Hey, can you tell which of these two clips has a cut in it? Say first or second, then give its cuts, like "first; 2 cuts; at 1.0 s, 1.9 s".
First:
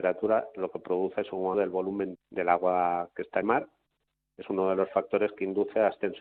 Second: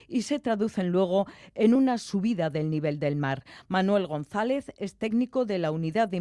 first; 3 cuts; at 1.5 s, 2.1 s, 3.4 s